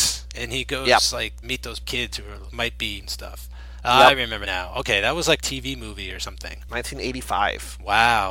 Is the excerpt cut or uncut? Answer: cut